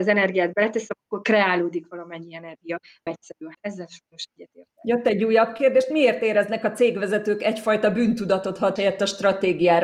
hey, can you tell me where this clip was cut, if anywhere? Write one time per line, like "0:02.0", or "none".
0:03.1
0:03.5
0:08.8